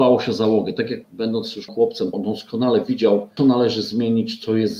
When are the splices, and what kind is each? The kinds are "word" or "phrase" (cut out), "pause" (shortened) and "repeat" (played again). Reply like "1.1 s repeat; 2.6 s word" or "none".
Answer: 1.0 s word; 1.7 s word; 2.1 s word; 3.4 s word